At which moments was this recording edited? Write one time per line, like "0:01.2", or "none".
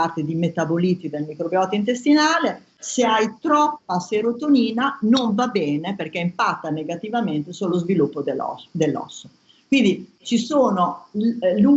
none